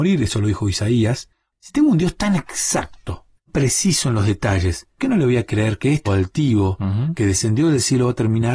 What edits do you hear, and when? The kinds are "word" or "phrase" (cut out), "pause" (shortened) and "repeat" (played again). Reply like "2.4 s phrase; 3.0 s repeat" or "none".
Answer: 3.5 s word; 5.0 s word; 6.1 s word